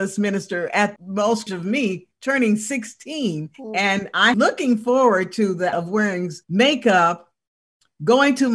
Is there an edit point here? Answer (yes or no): yes